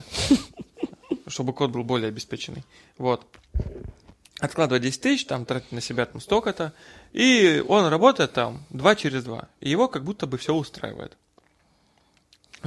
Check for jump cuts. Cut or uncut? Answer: uncut